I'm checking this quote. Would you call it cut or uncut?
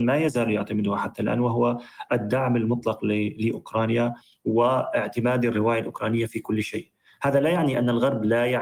uncut